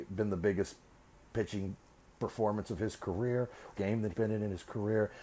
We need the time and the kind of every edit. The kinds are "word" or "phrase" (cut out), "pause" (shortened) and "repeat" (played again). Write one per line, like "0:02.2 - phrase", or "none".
0:03.8 - phrase
0:04.1 - word